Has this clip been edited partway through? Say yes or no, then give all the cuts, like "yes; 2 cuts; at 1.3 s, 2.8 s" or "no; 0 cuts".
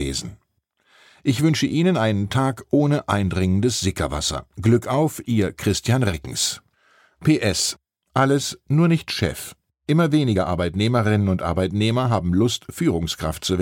no; 0 cuts